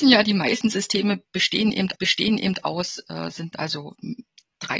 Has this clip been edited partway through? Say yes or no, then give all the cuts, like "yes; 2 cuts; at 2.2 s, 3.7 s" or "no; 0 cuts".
yes; 2 cuts; at 2.0 s, 3.5 s